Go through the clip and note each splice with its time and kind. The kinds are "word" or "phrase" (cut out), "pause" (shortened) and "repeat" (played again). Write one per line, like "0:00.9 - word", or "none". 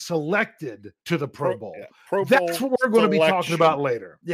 0:01.0 - pause